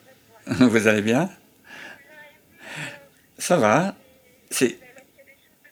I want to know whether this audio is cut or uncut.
uncut